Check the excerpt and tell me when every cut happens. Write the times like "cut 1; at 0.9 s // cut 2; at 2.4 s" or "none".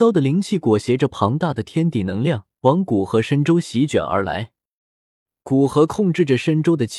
cut 1; at 2.5 s